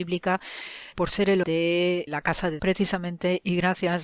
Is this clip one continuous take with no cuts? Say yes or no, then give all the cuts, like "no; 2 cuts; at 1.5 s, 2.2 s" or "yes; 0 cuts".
no; 4 cuts; at 0.9 s, 1.4 s, 2.1 s, 2.6 s